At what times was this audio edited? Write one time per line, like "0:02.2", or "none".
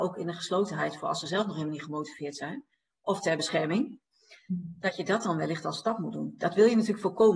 none